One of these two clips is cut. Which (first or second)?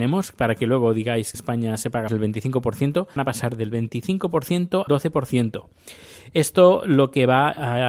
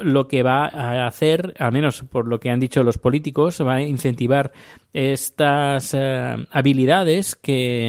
first